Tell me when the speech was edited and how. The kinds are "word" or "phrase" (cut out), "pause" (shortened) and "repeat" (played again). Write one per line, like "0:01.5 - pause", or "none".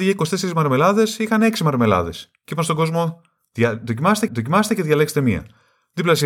0:04.3 - repeat